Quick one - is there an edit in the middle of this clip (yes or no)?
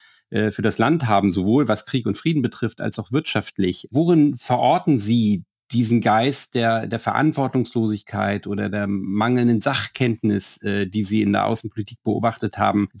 no